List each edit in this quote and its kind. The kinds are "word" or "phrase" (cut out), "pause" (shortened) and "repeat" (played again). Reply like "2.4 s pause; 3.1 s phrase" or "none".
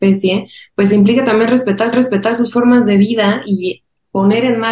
1.9 s repeat